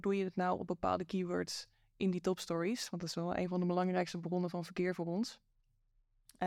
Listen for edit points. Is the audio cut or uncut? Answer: uncut